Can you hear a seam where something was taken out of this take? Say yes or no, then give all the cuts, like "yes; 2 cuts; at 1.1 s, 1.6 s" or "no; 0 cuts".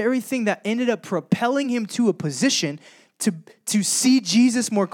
no; 0 cuts